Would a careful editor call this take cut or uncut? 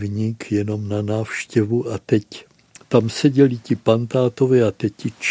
uncut